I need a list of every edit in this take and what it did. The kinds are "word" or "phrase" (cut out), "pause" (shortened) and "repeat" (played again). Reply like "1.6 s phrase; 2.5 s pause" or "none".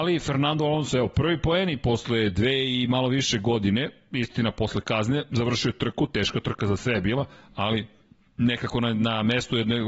none

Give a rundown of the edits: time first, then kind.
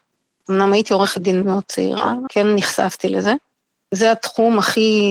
1.4 s word; 2.3 s word

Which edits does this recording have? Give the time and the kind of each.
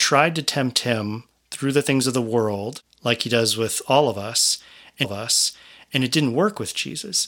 5.0 s repeat

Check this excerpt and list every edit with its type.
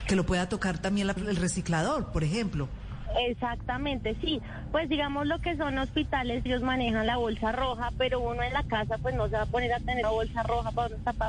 1.2 s word; 6.5 s word; 10.0 s word

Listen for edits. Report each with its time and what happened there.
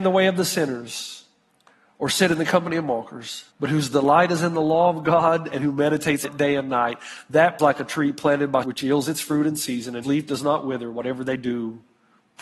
1.5 s pause; 3.5 s pause; 6.2 s word; 7.6 s phrase; 8.6 s phrase; 10.0 s word

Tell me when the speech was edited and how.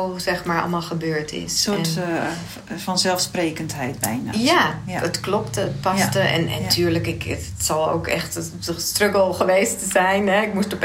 none

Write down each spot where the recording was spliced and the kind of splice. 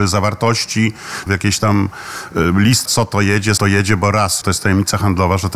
1.3 s phrase; 2.8 s word; 3.6 s word; 4.4 s word

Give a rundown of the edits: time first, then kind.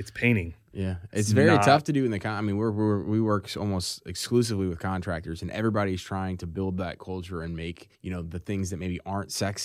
7.9 s pause

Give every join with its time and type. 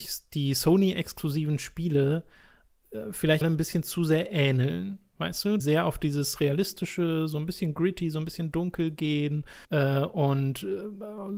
3.4 s word; 5.6 s phrase; 9.6 s pause

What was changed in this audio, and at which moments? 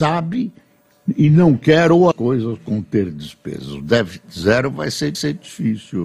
2.1 s phrase; 5.1 s repeat

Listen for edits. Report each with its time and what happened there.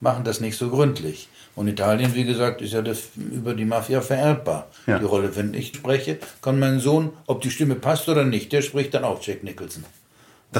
5.7 s word

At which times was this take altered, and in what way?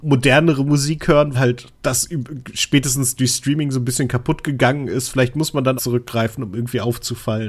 1.3 s word; 1.8 s pause; 5.8 s phrase

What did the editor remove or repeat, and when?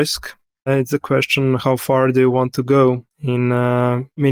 3.1 s pause

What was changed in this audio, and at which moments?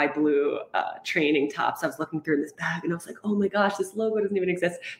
none

